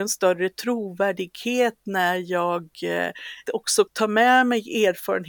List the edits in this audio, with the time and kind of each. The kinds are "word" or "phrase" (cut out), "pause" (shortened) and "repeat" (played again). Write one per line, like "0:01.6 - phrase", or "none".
0:03.5 - word
0:03.9 - word

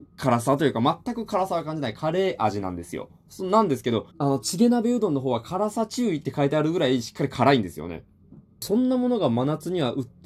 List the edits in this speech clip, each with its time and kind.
0:04.1 - pause

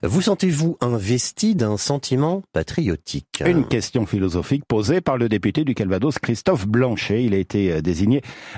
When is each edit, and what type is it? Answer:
none

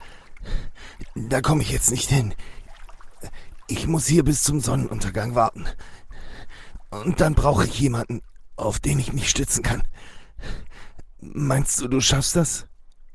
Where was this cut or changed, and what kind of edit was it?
none

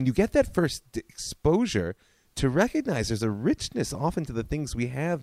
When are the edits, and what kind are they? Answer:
none

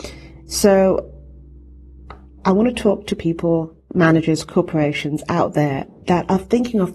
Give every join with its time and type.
none

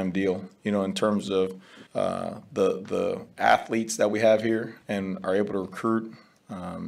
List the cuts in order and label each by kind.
0:01.9 - pause

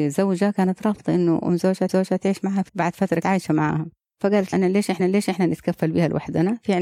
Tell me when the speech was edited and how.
0:01.9 - repeat
0:02.7 - word
0:03.2 - word
0:04.5 - word
0:05.0 - repeat

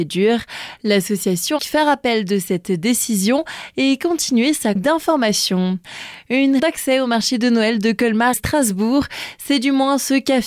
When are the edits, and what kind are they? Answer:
0:01.6 - word
0:04.8 - word
0:06.6 - word
0:08.3 - word

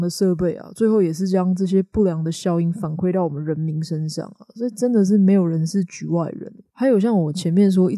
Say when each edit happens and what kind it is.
none

